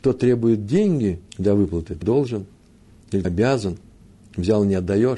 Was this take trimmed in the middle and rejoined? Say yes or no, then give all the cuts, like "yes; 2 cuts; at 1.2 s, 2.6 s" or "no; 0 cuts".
yes; 3 cuts; at 1.3 s, 2.0 s, 3.2 s